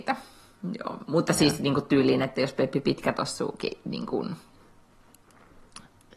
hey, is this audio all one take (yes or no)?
yes